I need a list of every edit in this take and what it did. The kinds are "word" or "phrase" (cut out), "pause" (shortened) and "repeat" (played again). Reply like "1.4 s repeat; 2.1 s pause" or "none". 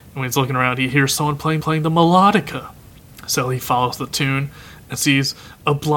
1.6 s repeat

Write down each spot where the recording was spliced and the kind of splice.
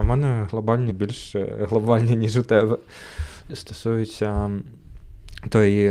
0.9 s word; 3.5 s phrase

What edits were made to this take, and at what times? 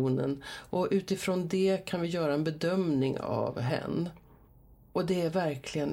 none

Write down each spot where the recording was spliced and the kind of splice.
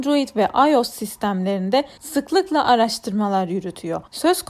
none

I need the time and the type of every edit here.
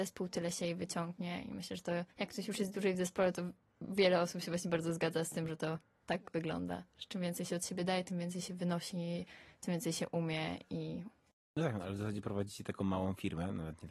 2.1 s pause

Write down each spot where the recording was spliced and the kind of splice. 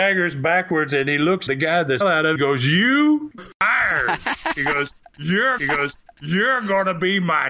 1.5 s word; 2.0 s phrase; 2.4 s phrase; 3.4 s word; 5.6 s repeat

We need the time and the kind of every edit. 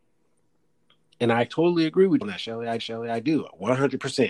2.2 s word; 2.8 s repeat

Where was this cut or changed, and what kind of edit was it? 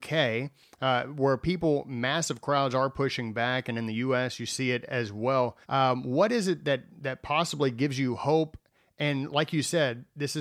5.6 s pause

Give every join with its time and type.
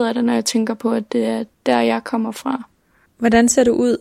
3.1 s pause

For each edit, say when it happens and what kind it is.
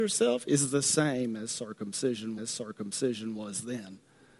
2.4 s repeat

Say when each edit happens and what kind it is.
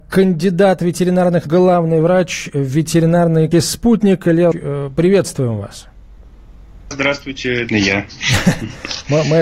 1.5 s word; 3.5 s word; 4.5 s word; 6.9 s word; 7.7 s word

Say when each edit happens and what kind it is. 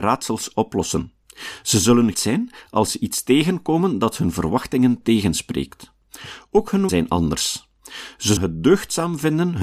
2.1 s word; 6.9 s word; 8.4 s word

